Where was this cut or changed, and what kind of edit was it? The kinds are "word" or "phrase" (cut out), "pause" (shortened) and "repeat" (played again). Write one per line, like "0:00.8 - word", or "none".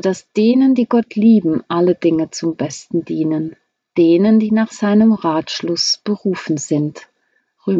none